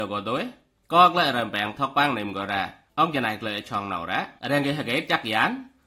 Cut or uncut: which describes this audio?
cut